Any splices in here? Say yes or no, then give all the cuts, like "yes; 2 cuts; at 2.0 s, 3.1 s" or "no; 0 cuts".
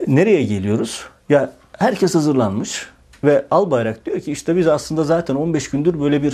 no; 0 cuts